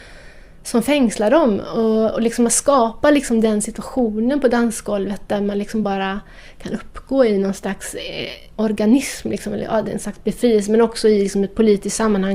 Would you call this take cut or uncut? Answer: uncut